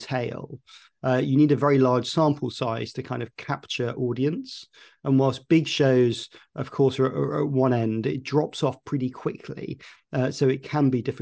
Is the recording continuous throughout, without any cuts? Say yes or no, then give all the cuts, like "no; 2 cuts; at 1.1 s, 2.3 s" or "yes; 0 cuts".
yes; 0 cuts